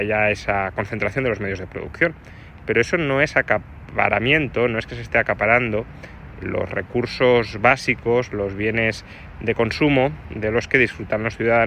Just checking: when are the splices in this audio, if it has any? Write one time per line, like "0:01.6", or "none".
0:06.4